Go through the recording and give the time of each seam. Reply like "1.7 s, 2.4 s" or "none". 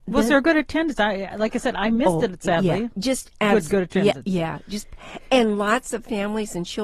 none